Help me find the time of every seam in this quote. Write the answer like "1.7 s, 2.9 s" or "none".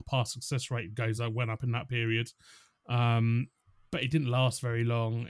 none